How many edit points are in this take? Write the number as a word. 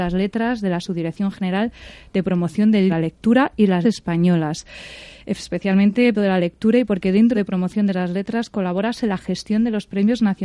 four